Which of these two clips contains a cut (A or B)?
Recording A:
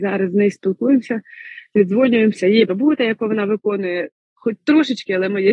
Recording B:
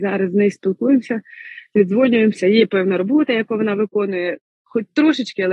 A